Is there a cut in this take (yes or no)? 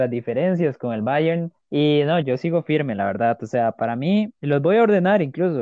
yes